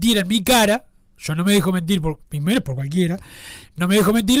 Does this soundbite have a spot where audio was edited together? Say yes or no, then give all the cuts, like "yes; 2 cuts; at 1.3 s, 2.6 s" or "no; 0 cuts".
no; 0 cuts